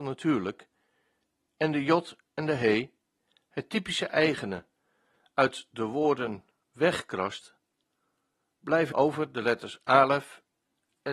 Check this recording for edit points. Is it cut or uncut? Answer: cut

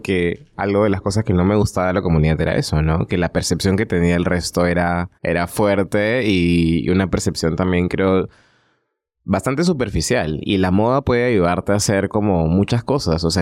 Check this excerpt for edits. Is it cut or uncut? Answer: cut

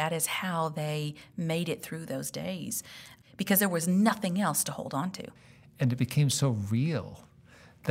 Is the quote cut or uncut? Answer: uncut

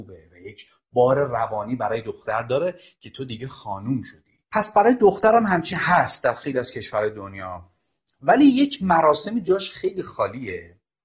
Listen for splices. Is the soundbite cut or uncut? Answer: cut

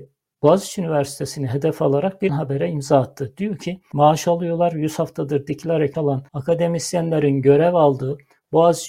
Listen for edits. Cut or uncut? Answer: cut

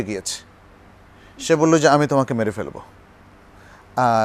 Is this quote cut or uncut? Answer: uncut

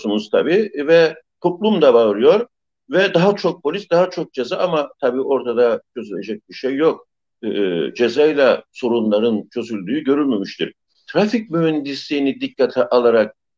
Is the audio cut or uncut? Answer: uncut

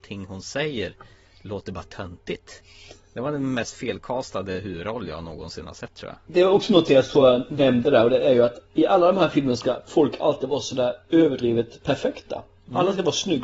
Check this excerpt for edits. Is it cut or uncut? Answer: uncut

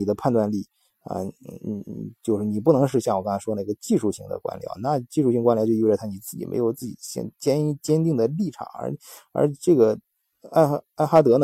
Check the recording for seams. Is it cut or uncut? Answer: uncut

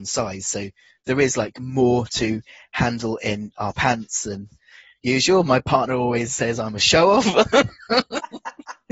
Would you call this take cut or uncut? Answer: uncut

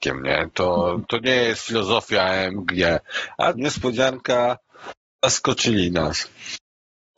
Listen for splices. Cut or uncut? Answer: cut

